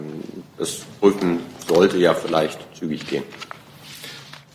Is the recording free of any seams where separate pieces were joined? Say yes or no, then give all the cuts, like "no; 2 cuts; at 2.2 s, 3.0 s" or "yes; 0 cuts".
yes; 0 cuts